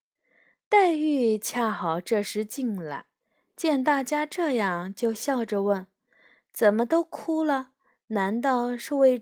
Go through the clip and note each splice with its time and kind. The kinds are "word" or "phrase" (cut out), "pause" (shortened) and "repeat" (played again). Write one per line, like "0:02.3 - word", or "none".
none